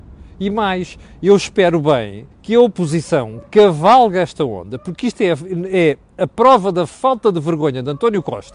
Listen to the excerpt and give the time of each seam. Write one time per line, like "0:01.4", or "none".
0:02.3